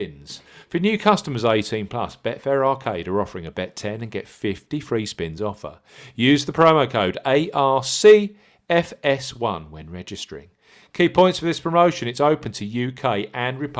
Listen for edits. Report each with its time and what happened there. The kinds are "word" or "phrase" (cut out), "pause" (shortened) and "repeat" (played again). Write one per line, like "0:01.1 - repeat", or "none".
none